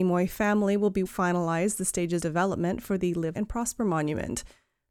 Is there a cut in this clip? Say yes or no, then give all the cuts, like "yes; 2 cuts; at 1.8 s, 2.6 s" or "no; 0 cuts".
yes; 3 cuts; at 1.1 s, 2.2 s, 3.4 s